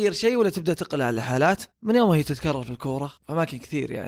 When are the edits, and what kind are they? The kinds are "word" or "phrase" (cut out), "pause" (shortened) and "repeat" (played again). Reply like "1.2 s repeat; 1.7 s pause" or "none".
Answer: 1.7 s pause; 3.2 s pause

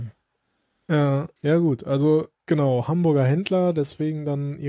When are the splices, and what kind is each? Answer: 1.4 s pause; 2.3 s pause

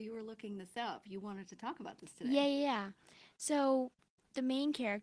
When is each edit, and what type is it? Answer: none

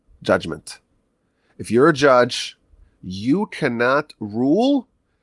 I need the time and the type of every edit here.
none

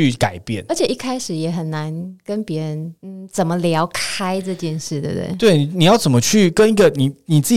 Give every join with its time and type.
3.0 s pause

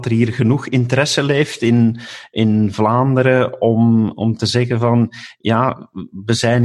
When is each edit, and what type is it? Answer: none

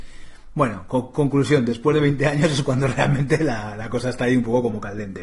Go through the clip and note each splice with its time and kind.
none

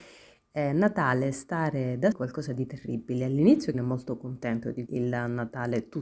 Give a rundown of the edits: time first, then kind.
2.1 s phrase; 3.7 s word; 4.9 s word

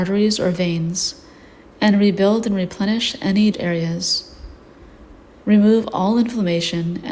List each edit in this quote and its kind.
3.5 s word

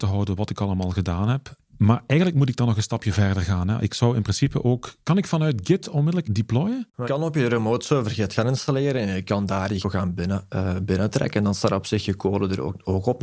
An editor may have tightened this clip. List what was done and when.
6.2 s word; 7.0 s word; 9.8 s word

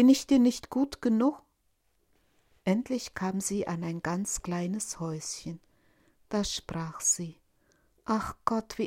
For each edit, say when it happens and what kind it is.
none

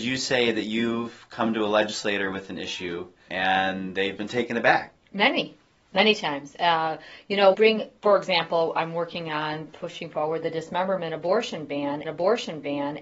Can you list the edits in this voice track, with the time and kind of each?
3.3 s word; 4.2 s word; 7.5 s word; 12.0 s repeat

